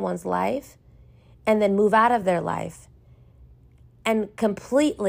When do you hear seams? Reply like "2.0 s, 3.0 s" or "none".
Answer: none